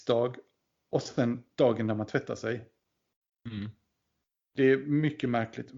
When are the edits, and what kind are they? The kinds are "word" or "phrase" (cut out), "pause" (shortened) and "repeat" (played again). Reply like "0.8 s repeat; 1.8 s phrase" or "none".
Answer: 1.5 s pause